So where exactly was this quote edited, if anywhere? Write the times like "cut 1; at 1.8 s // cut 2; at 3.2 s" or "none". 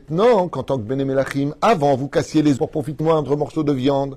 cut 1; at 2.6 s // cut 2; at 3.0 s